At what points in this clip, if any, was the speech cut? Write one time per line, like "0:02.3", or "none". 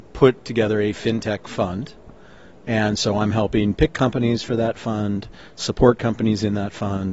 none